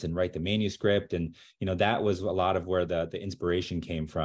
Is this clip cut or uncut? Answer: uncut